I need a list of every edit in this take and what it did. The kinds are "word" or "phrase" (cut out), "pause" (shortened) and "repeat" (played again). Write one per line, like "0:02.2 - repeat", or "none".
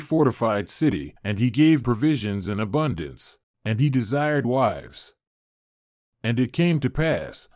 0:01.2 - pause
0:01.8 - word
0:03.4 - pause
0:04.4 - word